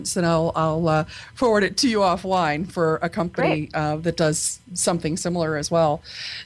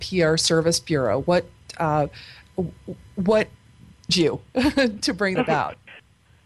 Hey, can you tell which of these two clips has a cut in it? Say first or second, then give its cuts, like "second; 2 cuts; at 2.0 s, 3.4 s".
second; 2 cuts; at 4.1 s, 5.4 s